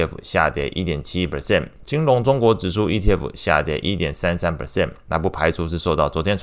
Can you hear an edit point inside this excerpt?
no; 0 cuts

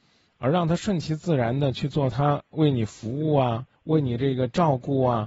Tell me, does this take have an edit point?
yes; 1 cut; at 3.7 s

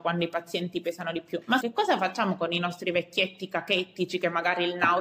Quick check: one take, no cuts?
no; 1 cut; at 1.6 s

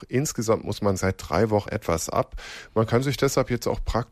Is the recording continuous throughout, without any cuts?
no; 2 cuts; at 1.0 s, 1.7 s

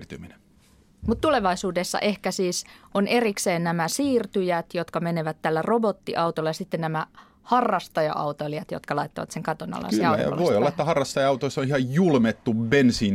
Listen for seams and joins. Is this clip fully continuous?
yes; 0 cuts

